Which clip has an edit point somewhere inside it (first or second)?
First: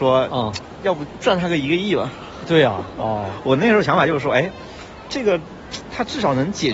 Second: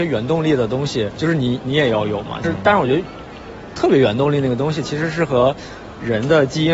second